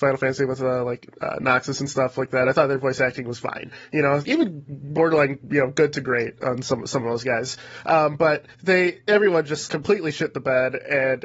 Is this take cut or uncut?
cut